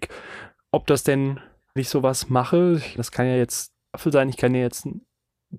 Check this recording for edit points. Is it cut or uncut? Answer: cut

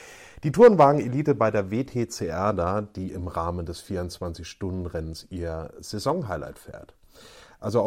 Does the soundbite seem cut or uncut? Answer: uncut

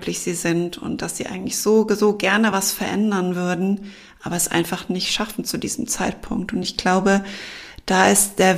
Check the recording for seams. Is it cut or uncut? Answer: uncut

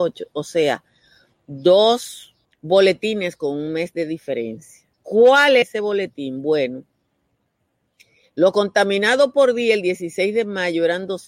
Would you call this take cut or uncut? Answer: cut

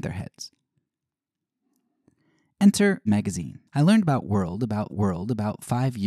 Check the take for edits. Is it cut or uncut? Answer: cut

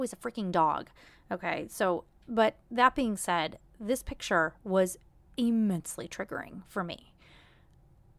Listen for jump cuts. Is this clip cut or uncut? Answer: cut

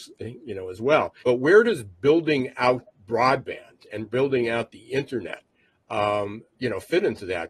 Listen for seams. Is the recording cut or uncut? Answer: cut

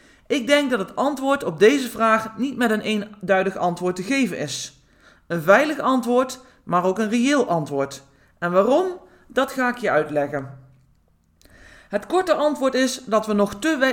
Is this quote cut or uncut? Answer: uncut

